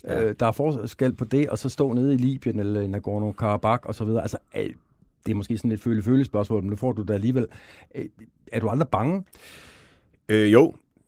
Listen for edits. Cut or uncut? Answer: uncut